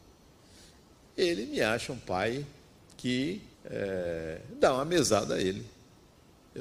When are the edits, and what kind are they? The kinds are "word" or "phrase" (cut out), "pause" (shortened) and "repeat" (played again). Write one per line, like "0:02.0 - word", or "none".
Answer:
0:03.5 - pause

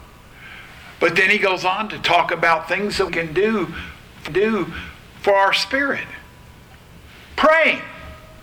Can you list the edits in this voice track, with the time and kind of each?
0:03.1 - word
0:04.3 - repeat

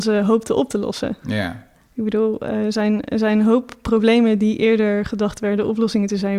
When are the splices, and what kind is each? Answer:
none

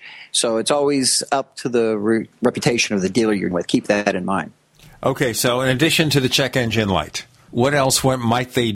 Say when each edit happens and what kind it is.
0:03.5 - word

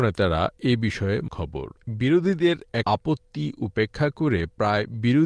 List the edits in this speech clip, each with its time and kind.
0:01.3 - phrase
0:02.8 - word

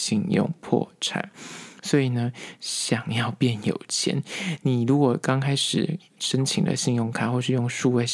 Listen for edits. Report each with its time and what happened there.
none

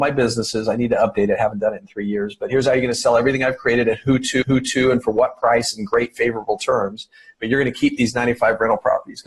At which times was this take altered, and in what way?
0:04.4 - repeat

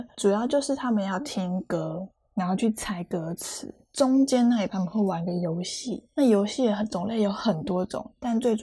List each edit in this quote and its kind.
0:04.7 - word

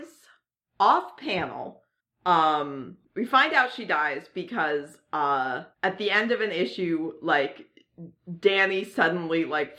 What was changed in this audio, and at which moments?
0:03.0 - pause
0:05.7 - pause

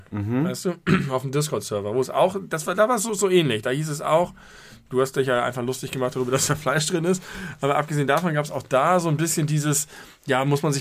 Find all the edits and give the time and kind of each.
none

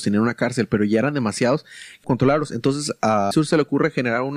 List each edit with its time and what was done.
0:02.0 - phrase
0:03.3 - word

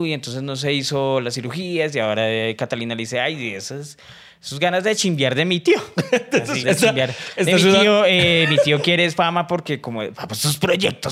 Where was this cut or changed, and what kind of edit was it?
0:06.6 - word
0:10.1 - word

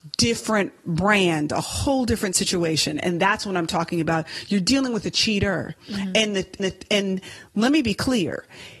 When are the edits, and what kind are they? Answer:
0:06.6 - repeat

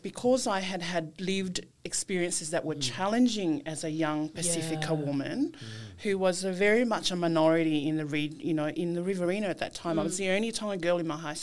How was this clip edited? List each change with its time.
0:01.7 - pause

